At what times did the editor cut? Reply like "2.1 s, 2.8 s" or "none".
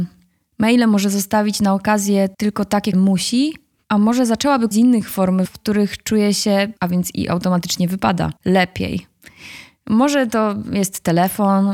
2.3 s, 2.9 s, 3.8 s, 4.7 s, 5.4 s, 6.8 s, 8.4 s

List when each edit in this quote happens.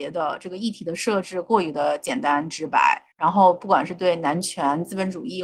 3.1 s

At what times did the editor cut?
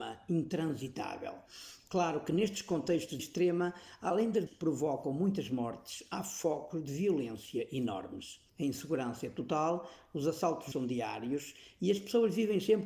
3.2 s, 4.5 s, 8.5 s, 10.7 s

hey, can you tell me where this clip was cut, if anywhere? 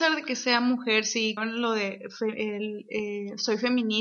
1.4 s

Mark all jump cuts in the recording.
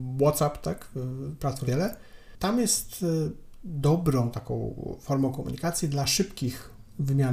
1.6 s, 4.3 s

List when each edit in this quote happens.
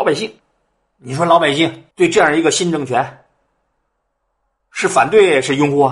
1.9 s

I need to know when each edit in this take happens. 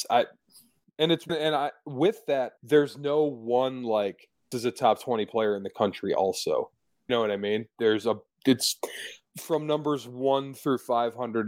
1.3 s, 2.6 s, 4.5 s, 7.1 s

